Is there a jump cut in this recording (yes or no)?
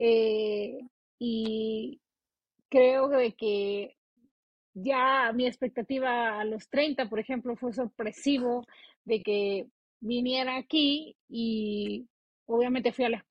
no